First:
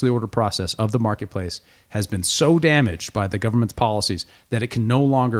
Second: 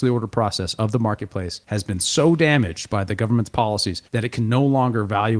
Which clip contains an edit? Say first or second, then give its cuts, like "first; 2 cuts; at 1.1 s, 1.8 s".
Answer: second; 2 cuts; at 1.6 s, 4.1 s